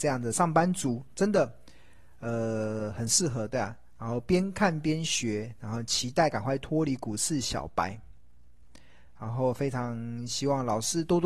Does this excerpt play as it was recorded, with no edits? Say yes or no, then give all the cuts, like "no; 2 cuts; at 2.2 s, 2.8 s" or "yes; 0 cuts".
yes; 0 cuts